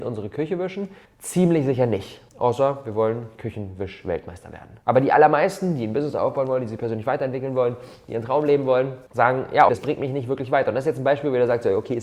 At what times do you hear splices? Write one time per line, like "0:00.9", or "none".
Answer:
0:01.0
0:02.3
0:04.8
0:09.1
0:09.7